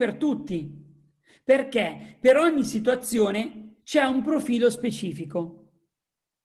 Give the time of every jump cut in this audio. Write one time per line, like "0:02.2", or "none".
0:03.8